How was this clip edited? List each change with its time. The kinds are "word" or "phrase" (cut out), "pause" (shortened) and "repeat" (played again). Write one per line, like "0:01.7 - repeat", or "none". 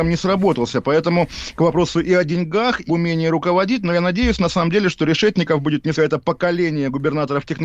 0:02.9 - word
0:06.0 - phrase